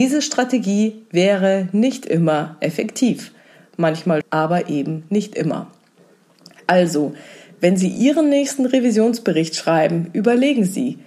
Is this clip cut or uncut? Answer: cut